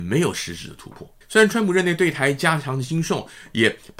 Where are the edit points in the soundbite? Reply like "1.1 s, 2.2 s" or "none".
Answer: 1.2 s

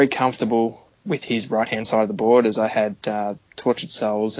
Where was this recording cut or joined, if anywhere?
none

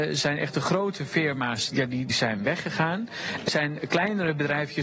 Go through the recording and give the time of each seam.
1.7 s, 2.1 s, 3.5 s

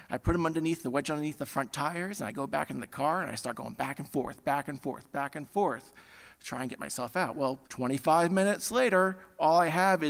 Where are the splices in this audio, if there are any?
7.6 s

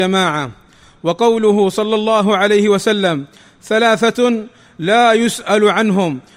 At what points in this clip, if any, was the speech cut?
none

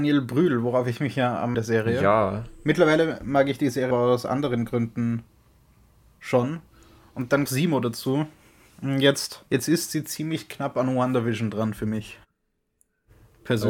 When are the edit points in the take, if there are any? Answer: 1.5 s, 3.9 s, 7.5 s, 9.5 s

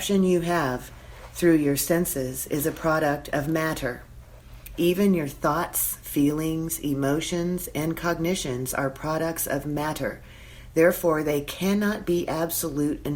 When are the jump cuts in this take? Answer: none

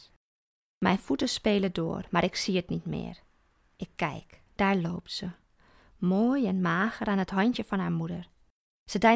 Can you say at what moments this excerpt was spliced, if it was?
4.5 s

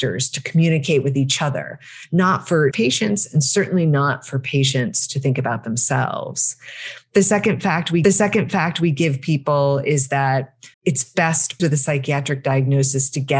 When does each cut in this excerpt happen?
2.7 s, 8.0 s, 10.7 s, 11.6 s

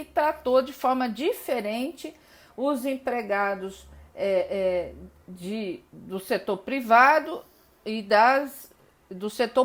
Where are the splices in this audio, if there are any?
none

